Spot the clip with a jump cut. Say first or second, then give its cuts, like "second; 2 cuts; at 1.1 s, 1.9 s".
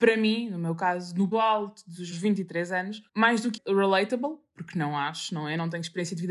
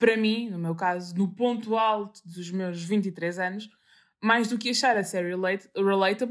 first; 4 cuts; at 1.3 s, 2.1 s, 3.1 s, 3.6 s